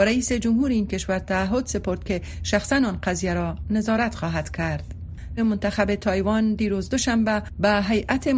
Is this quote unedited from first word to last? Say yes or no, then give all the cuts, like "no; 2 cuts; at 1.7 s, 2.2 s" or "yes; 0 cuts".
no; 1 cut; at 5.4 s